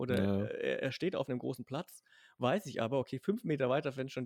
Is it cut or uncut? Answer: uncut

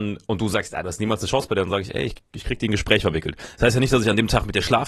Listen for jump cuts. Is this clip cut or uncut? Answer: uncut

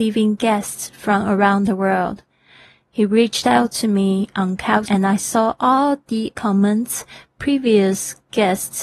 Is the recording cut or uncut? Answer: cut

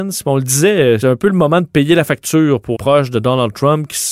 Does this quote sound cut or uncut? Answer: cut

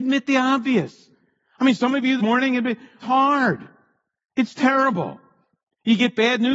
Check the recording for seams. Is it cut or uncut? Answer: cut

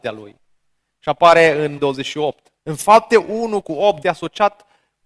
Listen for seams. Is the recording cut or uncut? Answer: cut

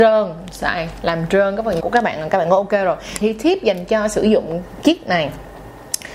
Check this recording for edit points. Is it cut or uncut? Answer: cut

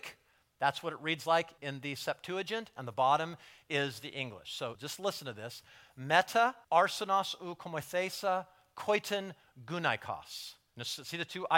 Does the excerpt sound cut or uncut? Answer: cut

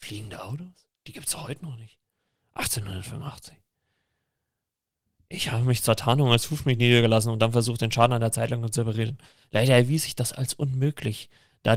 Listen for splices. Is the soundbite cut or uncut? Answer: uncut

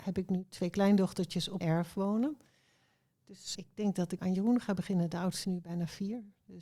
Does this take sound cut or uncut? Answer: cut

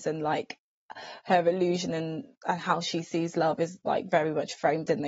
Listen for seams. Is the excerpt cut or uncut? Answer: uncut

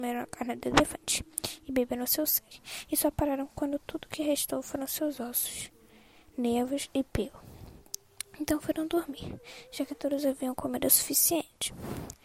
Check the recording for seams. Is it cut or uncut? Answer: uncut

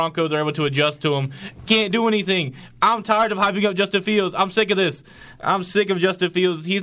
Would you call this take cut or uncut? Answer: cut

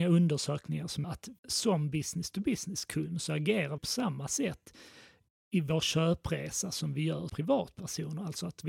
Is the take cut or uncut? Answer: cut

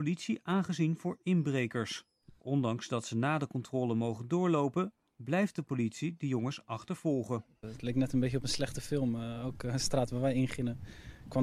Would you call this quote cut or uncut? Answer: uncut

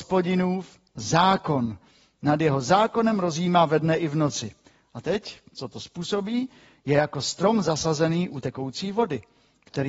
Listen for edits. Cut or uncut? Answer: uncut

